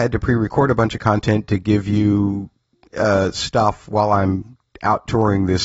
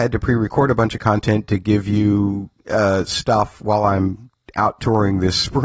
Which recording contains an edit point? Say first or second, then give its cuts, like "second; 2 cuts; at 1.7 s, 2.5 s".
second; 1 cut; at 2.6 s